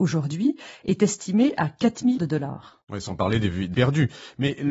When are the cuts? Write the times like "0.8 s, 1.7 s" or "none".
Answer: 2.2 s, 3.7 s